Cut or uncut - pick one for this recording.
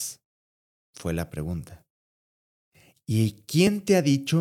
cut